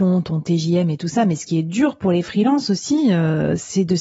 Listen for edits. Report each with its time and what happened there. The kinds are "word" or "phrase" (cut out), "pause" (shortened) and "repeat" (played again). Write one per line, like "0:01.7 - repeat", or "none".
none